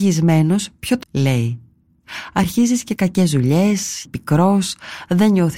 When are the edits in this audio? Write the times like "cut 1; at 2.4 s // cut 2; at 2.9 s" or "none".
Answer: cut 1; at 1.0 s // cut 2; at 3.0 s // cut 3; at 4.1 s